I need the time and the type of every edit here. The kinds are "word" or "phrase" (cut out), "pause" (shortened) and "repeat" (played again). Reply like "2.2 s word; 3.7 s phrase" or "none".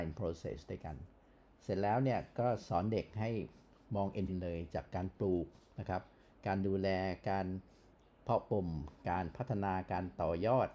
4.3 s word